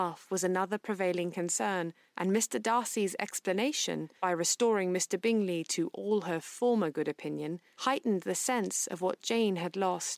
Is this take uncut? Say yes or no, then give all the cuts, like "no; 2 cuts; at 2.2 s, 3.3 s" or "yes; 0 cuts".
yes; 0 cuts